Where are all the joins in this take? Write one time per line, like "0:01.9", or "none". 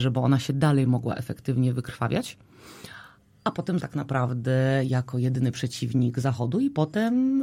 0:03.8